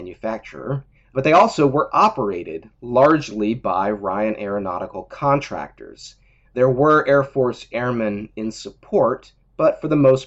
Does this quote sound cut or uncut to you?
uncut